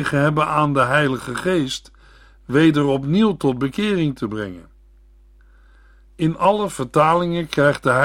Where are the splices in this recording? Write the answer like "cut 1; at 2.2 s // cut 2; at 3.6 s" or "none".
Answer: none